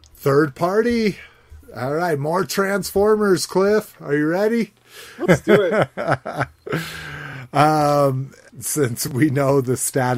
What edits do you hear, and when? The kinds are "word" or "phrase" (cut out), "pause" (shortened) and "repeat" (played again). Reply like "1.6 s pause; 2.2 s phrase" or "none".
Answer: 5.3 s word; 8.5 s phrase

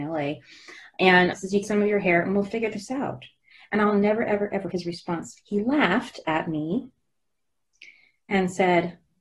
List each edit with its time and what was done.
1.3 s word; 1.6 s phrase; 4.2 s word; 4.7 s word

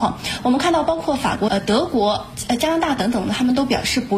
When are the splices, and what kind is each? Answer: 1.5 s phrase

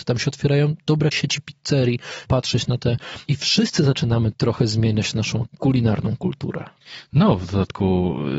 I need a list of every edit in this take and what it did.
1.1 s word; 2.2 s word; 3.3 s word; 4.3 s word; 5.5 s word

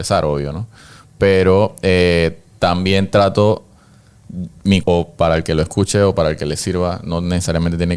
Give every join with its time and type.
4.8 s word

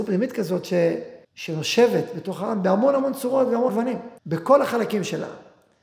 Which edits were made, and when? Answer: 1.2 s pause; 3.7 s word; 4.2 s pause

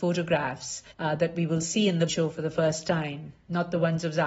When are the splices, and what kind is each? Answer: 0.9 s pause; 2.1 s word

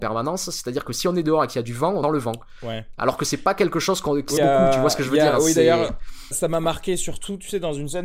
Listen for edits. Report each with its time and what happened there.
2.0 s word; 4.4 s word; 6.3 s word

